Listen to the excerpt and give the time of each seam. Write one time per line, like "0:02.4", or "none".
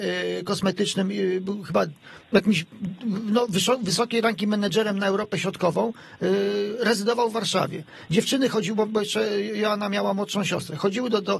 none